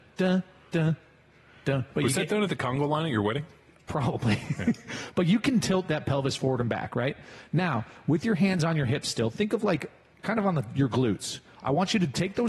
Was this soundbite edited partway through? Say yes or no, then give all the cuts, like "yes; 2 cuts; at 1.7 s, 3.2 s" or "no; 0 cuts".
no; 0 cuts